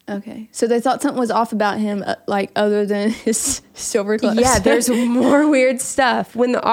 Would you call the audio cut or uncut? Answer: uncut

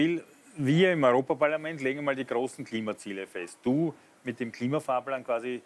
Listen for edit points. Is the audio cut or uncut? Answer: uncut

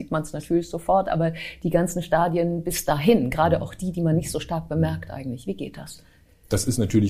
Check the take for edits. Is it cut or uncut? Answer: uncut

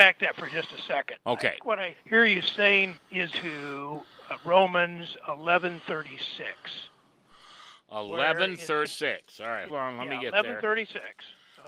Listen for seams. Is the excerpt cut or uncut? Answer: cut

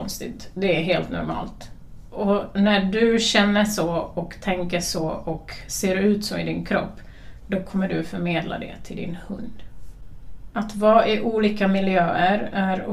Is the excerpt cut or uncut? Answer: uncut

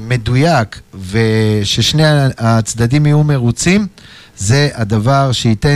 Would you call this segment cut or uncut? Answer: uncut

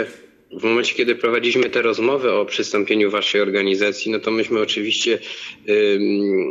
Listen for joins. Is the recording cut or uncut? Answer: uncut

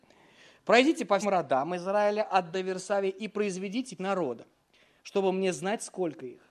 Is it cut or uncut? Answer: cut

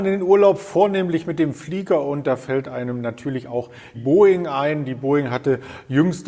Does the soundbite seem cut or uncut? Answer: cut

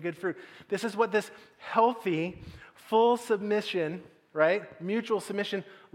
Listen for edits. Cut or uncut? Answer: uncut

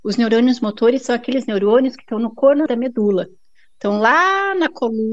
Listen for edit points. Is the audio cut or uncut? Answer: cut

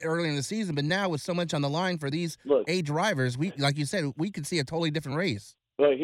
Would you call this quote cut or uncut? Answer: uncut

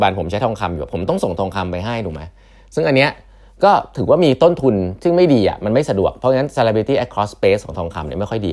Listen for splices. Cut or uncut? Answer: uncut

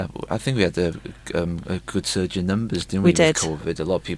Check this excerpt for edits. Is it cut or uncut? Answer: uncut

